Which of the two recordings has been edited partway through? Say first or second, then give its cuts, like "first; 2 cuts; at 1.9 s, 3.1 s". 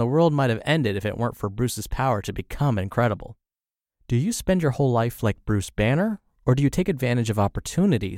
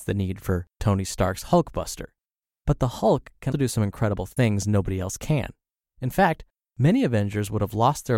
second; 1 cut; at 3.5 s